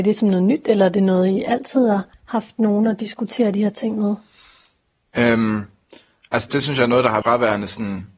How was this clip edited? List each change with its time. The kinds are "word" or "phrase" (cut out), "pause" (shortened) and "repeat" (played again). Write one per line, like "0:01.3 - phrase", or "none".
0:02.1 - pause
0:06.5 - word
0:07.2 - word